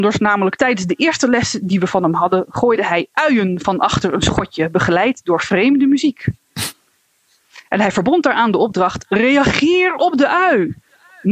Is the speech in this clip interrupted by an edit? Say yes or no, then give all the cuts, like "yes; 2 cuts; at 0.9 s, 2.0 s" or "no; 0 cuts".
no; 0 cuts